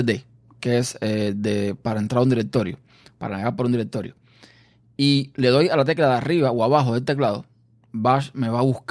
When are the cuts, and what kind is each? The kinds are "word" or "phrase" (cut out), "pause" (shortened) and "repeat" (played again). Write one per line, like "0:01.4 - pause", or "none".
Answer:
none